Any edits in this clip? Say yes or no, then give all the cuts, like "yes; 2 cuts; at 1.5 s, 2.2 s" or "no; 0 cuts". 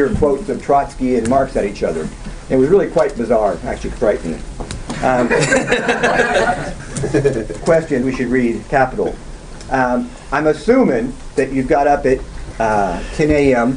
yes; 4 cuts; at 3.9 s, 6.8 s, 7.6 s, 8.0 s